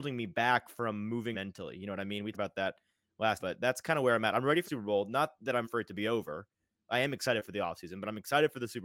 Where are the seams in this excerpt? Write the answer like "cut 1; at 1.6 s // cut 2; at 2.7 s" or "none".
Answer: cut 1; at 1.3 s // cut 2; at 2.3 s // cut 3; at 3.4 s // cut 4; at 4.6 s // cut 5; at 5.6 s

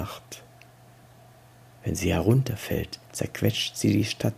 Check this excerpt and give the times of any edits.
cut 1; at 3.1 s

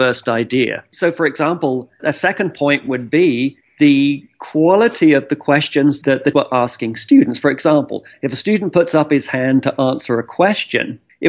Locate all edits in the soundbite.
cut 1; at 2.0 s // cut 2; at 6.0 s // cut 3; at 6.3 s

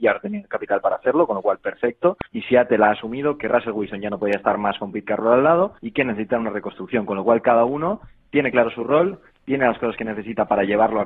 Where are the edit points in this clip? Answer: cut 1; at 2.3 s // cut 2; at 5.8 s

